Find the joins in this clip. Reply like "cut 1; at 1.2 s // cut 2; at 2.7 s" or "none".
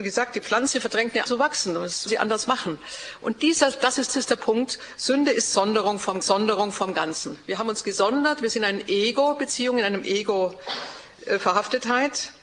cut 1; at 1.3 s // cut 2; at 2.1 s // cut 3; at 4.1 s // cut 4; at 6.2 s